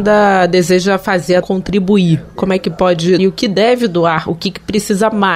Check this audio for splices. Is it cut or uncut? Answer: cut